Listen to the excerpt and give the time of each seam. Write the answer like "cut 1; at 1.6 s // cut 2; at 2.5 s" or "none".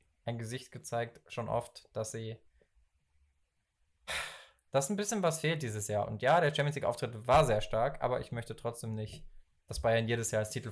none